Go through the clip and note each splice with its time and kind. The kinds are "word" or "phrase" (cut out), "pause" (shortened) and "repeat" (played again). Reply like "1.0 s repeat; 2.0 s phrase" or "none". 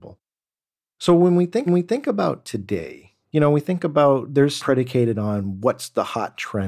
1.7 s repeat; 3.2 s pause; 4.6 s phrase